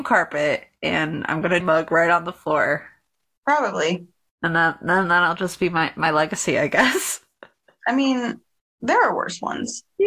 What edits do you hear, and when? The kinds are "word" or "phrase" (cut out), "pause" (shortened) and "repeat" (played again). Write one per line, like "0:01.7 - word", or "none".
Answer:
0:01.6 - phrase